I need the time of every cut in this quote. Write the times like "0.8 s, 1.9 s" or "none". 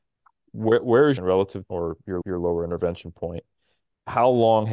1.2 s, 1.7 s, 2.2 s